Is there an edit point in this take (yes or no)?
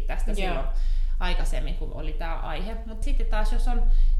yes